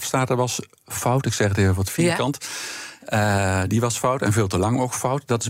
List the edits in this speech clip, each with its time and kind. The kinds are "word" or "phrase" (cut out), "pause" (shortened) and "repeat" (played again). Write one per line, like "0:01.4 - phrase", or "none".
none